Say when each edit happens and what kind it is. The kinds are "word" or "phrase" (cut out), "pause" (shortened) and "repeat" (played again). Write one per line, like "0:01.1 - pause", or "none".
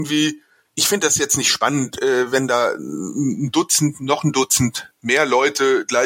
none